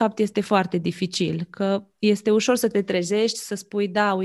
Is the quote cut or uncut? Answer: uncut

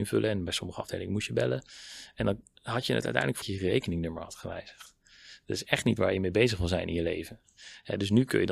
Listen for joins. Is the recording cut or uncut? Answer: cut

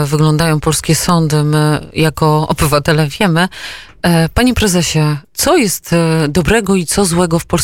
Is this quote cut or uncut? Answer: cut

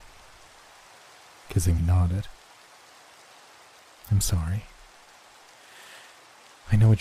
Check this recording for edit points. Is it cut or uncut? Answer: cut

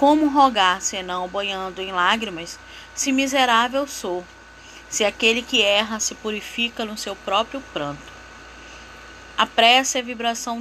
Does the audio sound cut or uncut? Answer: uncut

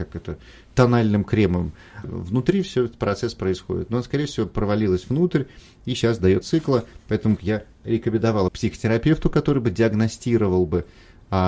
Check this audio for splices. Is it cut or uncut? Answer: cut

